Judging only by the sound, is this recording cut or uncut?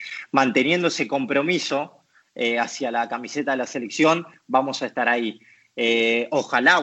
uncut